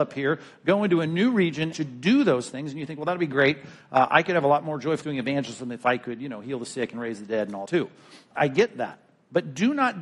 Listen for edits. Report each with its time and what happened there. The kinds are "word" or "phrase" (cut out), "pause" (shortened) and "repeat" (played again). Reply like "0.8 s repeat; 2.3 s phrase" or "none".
1.7 s phrase; 5.0 s word; 7.7 s word